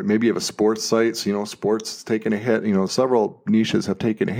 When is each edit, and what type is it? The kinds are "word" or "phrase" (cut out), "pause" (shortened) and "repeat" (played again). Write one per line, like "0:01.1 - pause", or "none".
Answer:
0:02.9 - word